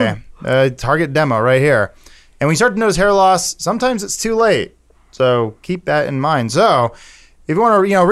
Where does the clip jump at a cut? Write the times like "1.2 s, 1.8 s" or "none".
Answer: none